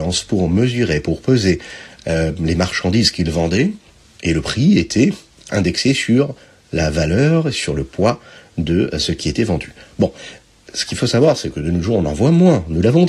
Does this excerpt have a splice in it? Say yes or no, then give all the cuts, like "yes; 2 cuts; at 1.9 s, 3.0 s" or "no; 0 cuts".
no; 0 cuts